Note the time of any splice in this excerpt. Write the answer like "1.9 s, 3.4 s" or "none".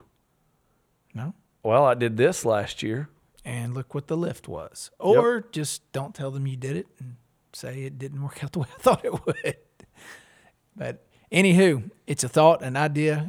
none